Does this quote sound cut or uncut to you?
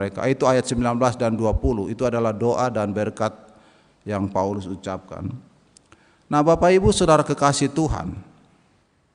uncut